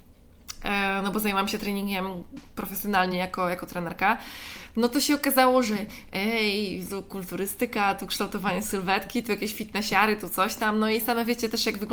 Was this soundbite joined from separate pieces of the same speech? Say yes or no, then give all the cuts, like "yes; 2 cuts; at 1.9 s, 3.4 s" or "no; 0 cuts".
no; 0 cuts